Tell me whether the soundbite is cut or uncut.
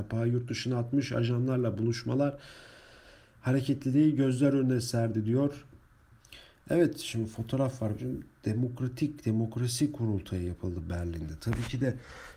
uncut